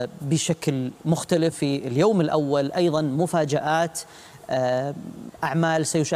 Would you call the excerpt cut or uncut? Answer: cut